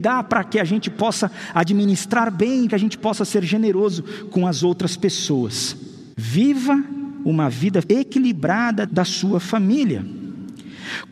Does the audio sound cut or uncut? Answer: cut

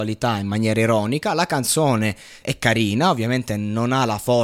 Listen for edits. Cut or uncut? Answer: cut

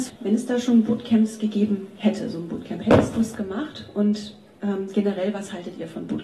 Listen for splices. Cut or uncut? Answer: uncut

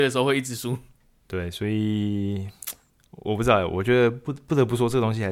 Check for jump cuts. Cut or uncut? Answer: uncut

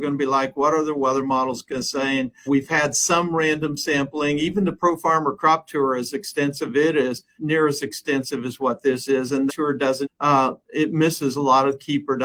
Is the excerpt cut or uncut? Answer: cut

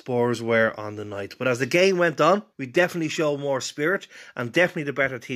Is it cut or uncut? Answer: cut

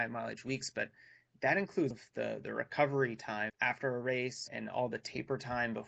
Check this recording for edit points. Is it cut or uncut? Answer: cut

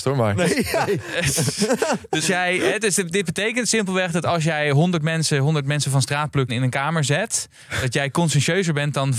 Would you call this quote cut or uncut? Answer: cut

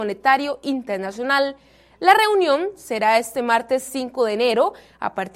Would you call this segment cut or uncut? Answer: uncut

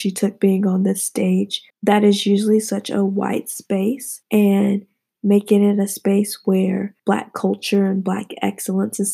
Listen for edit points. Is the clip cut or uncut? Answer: cut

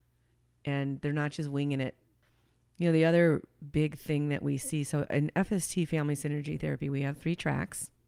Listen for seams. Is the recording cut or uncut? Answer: uncut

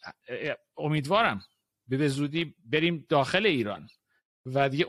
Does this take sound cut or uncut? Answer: uncut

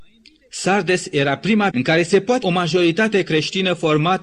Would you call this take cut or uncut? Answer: cut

